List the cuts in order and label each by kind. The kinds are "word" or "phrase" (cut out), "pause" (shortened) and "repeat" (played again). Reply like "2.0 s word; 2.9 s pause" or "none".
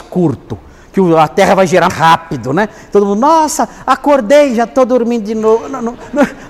1.9 s word